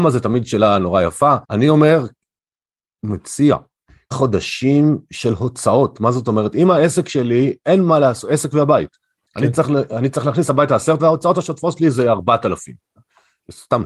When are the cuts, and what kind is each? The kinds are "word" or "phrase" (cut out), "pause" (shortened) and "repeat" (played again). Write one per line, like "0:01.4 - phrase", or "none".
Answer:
0:01.4 - pause
0:04.1 - word
0:11.0 - word